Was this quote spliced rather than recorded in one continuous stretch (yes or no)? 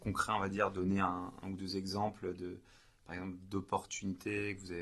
no